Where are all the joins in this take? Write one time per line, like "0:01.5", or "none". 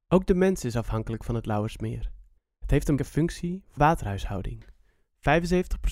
0:02.4
0:03.0
0:03.8